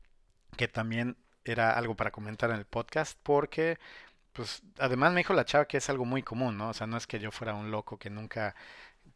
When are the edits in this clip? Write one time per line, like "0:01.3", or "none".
none